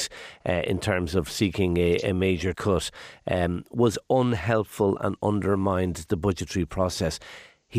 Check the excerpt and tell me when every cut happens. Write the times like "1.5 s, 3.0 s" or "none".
2.5 s